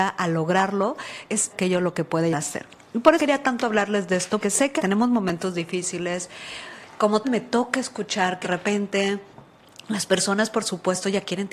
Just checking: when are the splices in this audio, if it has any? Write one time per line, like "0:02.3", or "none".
0:01.5
0:02.3
0:03.2
0:04.4
0:04.8
0:07.2
0:08.4